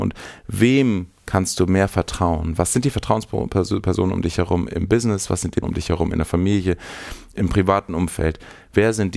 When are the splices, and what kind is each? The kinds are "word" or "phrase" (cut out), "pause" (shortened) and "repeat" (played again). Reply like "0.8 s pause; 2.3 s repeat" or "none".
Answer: 5.6 s word